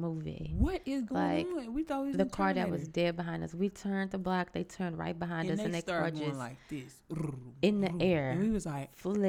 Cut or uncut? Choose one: uncut